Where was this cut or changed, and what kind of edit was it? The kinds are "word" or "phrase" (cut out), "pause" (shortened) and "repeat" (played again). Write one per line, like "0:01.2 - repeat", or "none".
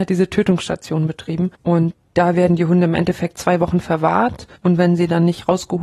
0:01.5 - pause
0:04.6 - pause